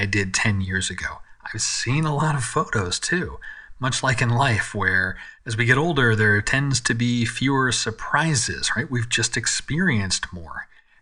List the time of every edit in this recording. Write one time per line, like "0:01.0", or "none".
0:05.4